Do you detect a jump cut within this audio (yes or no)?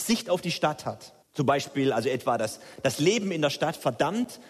yes